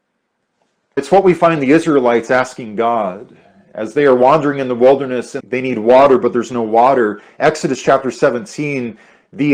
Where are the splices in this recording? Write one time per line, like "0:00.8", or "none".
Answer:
none